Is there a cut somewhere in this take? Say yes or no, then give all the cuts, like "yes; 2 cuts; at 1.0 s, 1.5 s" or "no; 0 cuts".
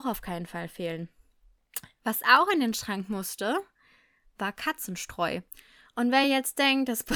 no; 0 cuts